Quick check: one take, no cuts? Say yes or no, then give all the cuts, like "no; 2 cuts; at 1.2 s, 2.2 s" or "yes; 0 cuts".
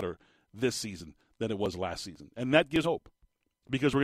no; 1 cut; at 2.8 s